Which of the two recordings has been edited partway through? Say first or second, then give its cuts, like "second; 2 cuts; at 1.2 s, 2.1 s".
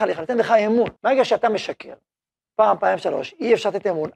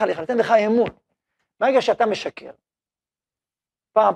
first; 2 cuts; at 1.0 s, 2.1 s